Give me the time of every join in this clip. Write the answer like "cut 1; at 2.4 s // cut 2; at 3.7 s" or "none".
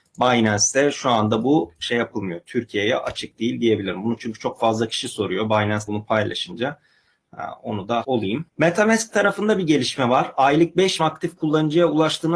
cut 1; at 5.9 s // cut 2; at 8.0 s // cut 3; at 8.5 s // cut 4; at 11.0 s